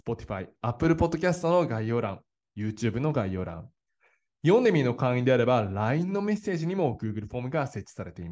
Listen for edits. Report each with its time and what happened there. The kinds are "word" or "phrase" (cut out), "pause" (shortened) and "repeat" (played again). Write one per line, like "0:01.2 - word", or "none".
none

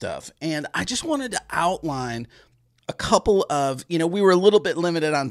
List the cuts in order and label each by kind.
none

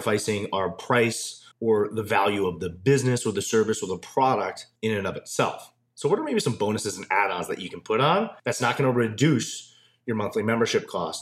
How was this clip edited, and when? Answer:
0:01.5 - pause
0:04.8 - pause
0:08.4 - pause

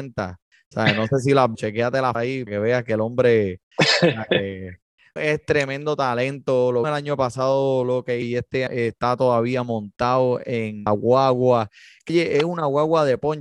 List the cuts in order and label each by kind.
0:01.5 - word
0:02.1 - word
0:02.5 - word
0:05.2 - word
0:06.8 - word
0:08.2 - word
0:08.7 - word
0:10.9 - word
0:12.1 - word

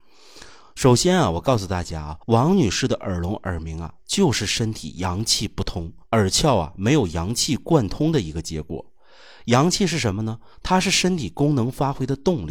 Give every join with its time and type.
0:02.2 - pause
0:06.0 - pause

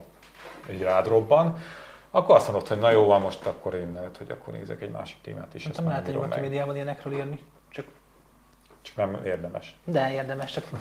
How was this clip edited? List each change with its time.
none

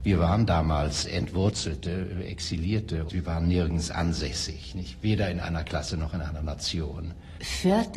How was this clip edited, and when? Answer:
0:03.1 - word

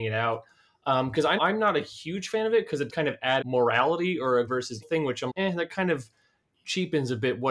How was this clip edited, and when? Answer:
0:01.4 - word
0:02.9 - word
0:03.4 - word
0:04.5 - word
0:04.8 - word
0:05.3 - word

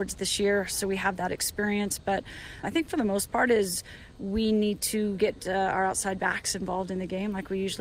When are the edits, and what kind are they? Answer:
0:02.6 - word

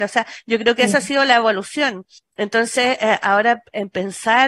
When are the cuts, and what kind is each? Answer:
0:02.2 - pause

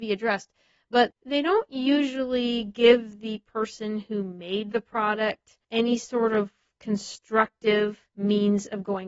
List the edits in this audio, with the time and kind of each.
0:05.6 - pause
0:08.1 - pause

